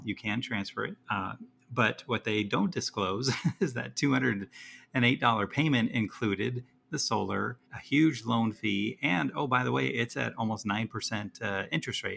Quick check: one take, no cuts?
no; 2 cuts; at 1.0 s, 7.7 s

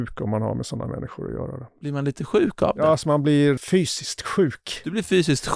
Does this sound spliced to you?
yes; 1 cut; at 3.6 s

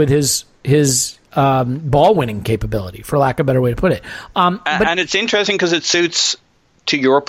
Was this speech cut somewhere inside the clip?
yes; 1 cut; at 1.2 s

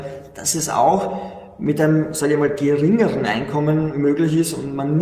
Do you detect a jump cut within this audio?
no; 0 cuts

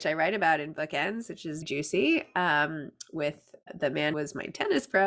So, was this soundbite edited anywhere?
yes; 3 cuts; at 1.6 s, 3.6 s, 4.1 s

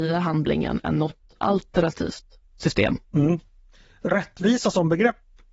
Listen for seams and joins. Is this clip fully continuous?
no; 1 cut; at 3.0 s

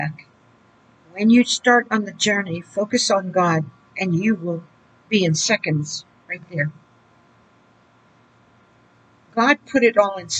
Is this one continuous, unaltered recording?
yes; 0 cuts

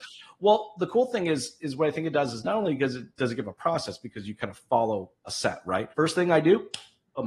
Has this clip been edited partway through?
yes; 1 cut; at 5.9 s

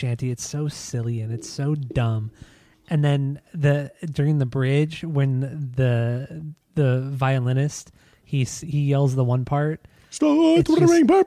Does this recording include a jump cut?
no; 0 cuts

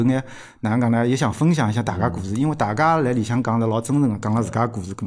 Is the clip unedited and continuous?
yes; 0 cuts

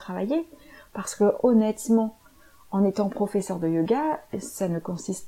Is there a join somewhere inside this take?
no; 0 cuts

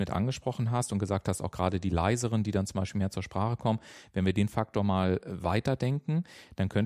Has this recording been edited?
no; 0 cuts

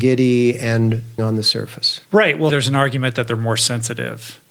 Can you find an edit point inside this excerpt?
yes; 3 cuts; at 1.2 s, 2.0 s, 2.5 s

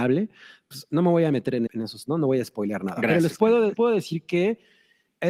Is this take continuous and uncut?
no; 3 cuts; at 1.7 s, 2.1 s, 3.7 s

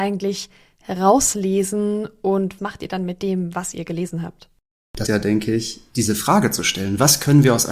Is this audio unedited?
no; 2 cuts; at 2.6 s, 5.1 s

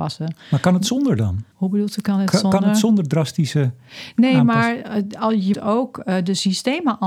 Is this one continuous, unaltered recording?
no; 2 cuts; at 1.5 s, 5.5 s

